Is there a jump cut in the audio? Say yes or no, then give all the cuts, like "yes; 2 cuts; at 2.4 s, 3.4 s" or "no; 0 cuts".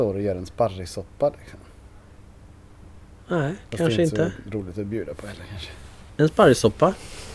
no; 0 cuts